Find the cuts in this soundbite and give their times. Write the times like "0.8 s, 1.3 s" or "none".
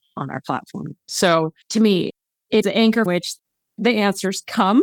1.6 s, 2.6 s, 3.1 s